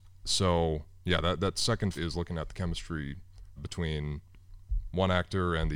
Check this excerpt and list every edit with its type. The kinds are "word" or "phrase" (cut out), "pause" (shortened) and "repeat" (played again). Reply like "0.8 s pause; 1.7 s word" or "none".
2.0 s word; 3.6 s word